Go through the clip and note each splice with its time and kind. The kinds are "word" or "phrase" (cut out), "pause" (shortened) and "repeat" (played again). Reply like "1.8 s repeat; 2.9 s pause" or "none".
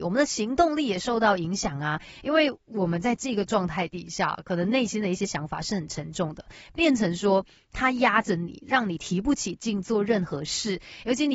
none